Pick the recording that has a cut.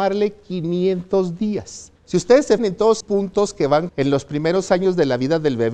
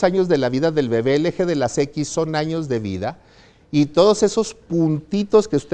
first; 4 cuts; at 2.0 s, 2.6 s, 3.0 s, 3.9 s

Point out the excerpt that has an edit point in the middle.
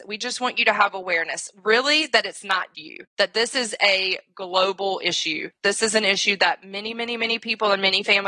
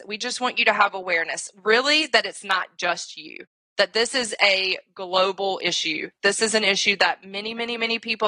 first; 2 cuts; at 2.7 s, 3.1 s

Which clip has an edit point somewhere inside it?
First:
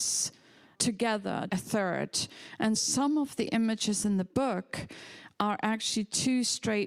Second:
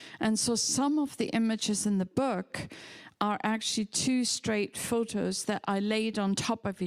first; 2 cuts; at 1.5 s, 2.8 s

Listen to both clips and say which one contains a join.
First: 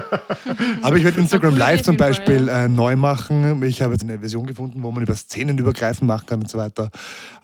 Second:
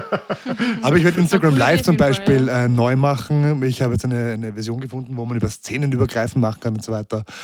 first; 1 cut; at 4.0 s

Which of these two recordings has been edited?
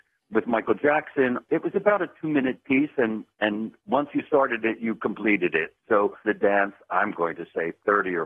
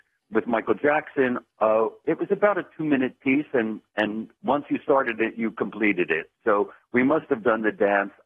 first; 2 cuts; at 1.4 s, 6.2 s

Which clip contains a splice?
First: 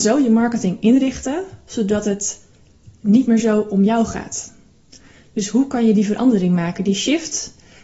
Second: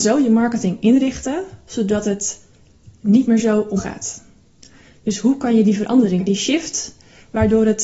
second; 2 cuts; at 3.8 s, 6.2 s

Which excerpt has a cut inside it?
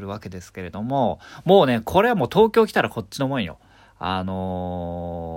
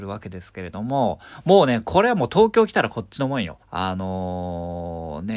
second; 1 cut; at 3.6 s

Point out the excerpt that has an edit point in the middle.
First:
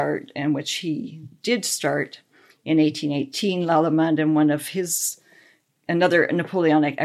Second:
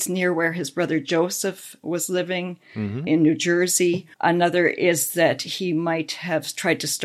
second; 1 cut; at 4.1 s

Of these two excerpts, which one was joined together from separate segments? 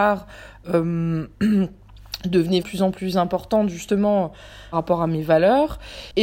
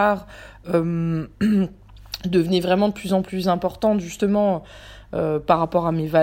first; 2 cuts; at 2.6 s, 4.7 s

